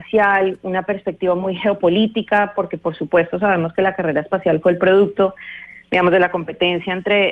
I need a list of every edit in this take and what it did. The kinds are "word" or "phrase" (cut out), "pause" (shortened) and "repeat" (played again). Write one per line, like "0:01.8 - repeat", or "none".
none